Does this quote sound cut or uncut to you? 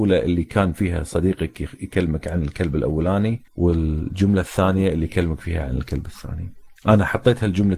cut